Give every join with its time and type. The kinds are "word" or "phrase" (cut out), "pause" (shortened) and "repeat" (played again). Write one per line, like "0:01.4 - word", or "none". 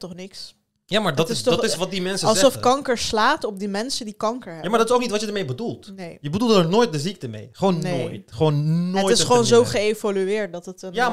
none